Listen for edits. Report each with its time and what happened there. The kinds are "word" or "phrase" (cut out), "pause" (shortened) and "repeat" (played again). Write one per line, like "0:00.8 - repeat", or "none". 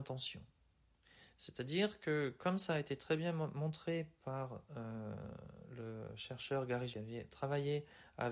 0:06.9 - phrase